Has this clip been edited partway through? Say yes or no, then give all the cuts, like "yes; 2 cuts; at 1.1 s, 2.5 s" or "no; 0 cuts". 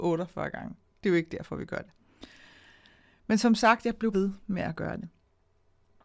yes; 1 cut; at 4.1 s